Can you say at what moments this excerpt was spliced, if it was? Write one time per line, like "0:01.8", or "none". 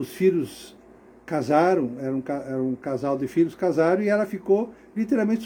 none